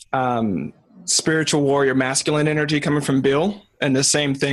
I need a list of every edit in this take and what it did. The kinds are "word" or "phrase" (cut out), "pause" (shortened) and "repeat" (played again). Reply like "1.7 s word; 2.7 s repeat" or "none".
none